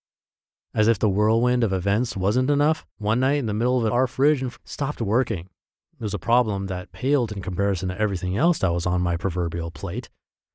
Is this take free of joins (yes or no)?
no